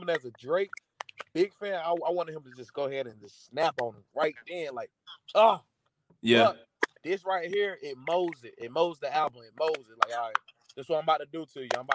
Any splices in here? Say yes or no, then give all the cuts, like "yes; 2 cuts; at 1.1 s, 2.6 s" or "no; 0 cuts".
yes; 1 cut; at 7.0 s